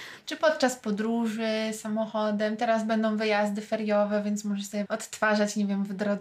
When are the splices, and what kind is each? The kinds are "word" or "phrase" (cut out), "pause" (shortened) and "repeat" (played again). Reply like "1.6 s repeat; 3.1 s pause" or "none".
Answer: 4.9 s word